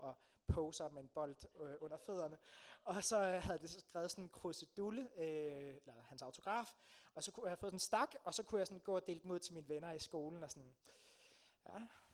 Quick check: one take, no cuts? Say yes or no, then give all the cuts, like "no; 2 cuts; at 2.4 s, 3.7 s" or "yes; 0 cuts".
yes; 0 cuts